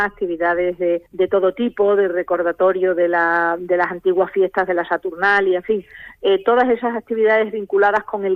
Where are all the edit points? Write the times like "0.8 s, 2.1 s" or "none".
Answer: 1.1 s

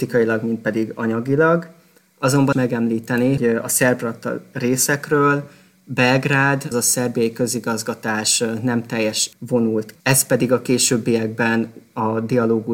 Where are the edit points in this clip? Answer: 2.5 s, 3.4 s, 6.7 s, 9.3 s, 9.9 s

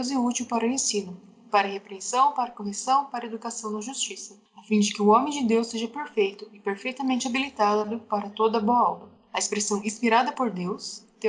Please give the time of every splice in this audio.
none

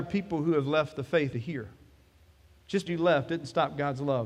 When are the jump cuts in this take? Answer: 1.3 s, 2.9 s

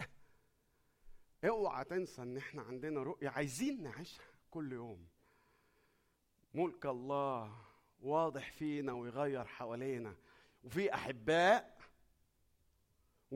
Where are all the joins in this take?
none

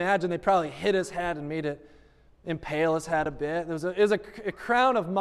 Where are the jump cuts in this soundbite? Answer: none

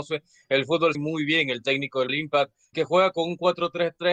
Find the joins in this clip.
0.9 s, 2.1 s, 2.7 s

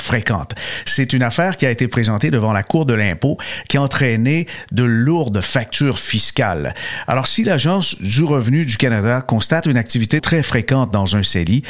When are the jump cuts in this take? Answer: 10.2 s

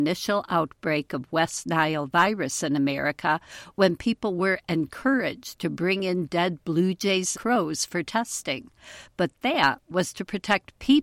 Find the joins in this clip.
7.3 s

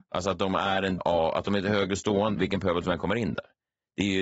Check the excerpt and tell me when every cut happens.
1.0 s, 2.3 s

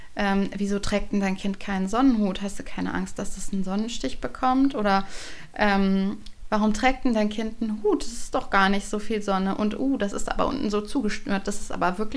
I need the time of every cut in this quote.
none

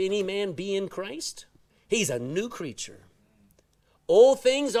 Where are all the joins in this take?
1.7 s

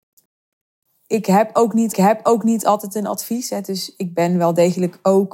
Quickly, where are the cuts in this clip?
1.9 s

